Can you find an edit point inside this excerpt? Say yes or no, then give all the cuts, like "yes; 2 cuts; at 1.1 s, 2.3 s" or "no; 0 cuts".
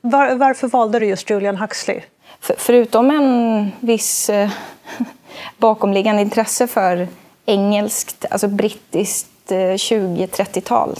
no; 0 cuts